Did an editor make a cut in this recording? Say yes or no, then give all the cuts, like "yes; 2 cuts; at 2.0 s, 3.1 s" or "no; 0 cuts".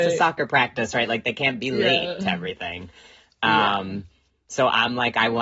no; 0 cuts